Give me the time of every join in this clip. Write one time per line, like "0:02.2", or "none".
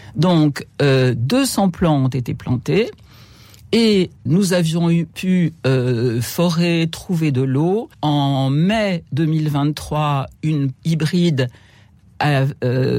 0:04.3
0:07.9
0:10.7